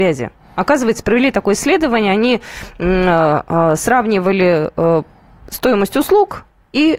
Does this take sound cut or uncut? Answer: uncut